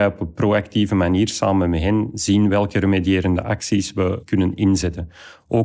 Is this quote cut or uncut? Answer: uncut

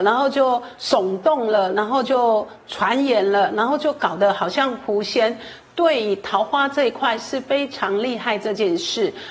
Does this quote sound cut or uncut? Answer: uncut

